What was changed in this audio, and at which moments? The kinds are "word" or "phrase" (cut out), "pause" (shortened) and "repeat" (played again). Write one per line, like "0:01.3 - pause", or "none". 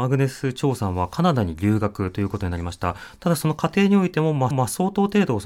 0:04.5 - repeat